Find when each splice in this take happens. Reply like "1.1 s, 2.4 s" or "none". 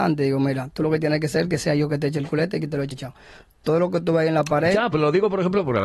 2.9 s, 4.9 s